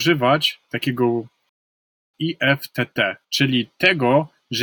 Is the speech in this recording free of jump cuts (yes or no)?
no